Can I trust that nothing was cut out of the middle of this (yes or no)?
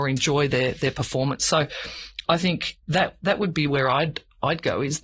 no